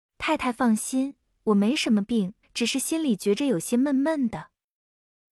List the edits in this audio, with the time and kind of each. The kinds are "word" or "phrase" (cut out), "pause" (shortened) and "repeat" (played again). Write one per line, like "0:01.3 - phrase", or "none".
0:02.4 - pause